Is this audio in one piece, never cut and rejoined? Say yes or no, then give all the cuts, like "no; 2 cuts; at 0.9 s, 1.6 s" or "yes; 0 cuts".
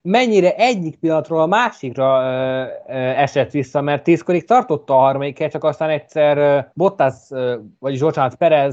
no; 1 cut; at 6.7 s